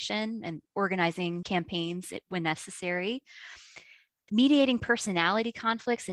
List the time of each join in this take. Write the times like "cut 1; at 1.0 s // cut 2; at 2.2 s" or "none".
cut 1; at 1.4 s